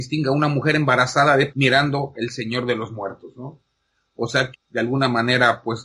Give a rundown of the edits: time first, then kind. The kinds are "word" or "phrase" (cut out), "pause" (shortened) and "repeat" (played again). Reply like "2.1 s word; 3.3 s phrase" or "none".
1.5 s word; 2.1 s word; 4.5 s word